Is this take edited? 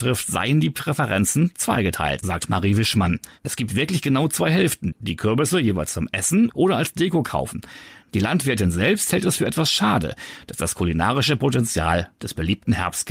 yes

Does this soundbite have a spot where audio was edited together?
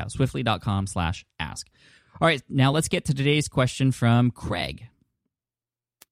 no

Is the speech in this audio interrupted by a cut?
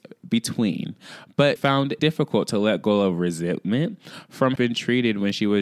yes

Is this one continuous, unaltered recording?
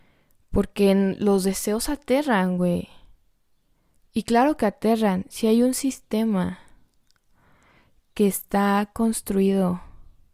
yes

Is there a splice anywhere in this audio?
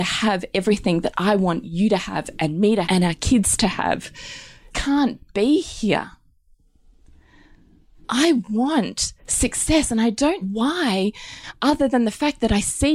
yes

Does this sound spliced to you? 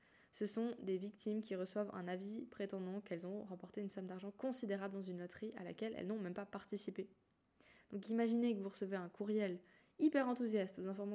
no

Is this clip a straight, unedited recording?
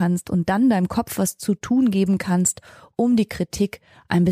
yes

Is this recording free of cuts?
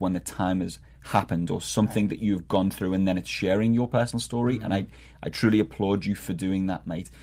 yes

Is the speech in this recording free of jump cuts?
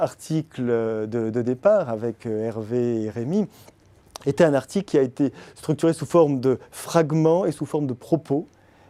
yes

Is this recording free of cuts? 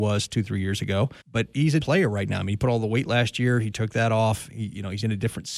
no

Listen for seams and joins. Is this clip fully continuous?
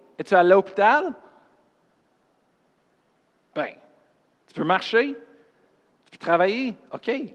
yes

